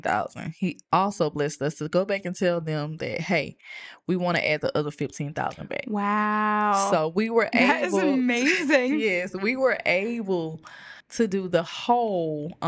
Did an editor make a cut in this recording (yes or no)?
no